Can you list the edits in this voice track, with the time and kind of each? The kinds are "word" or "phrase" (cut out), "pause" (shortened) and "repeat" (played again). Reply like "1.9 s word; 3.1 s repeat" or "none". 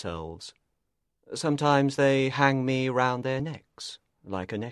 none